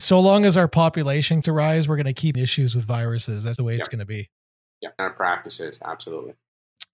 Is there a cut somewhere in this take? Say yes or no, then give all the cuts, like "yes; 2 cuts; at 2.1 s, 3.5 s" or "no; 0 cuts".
yes; 4 cuts; at 1.4 s, 2.3 s, 3.6 s, 5.0 s